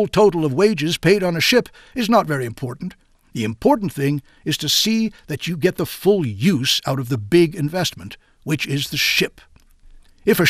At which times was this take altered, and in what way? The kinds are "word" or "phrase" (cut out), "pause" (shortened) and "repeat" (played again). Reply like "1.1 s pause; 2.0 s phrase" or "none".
none